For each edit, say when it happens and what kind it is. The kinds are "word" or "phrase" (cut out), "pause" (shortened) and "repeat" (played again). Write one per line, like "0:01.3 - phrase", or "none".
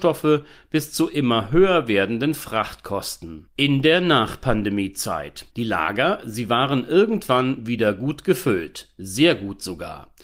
0:05.5 - pause